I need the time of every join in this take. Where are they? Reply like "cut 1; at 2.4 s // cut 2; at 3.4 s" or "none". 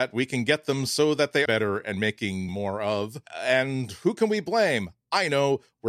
cut 1; at 1.5 s // cut 2; at 2.5 s // cut 3; at 3.3 s